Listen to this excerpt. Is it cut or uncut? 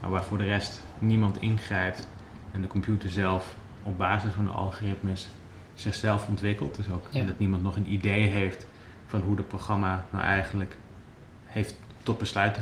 uncut